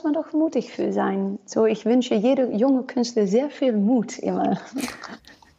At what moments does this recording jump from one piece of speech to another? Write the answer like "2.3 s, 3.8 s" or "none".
none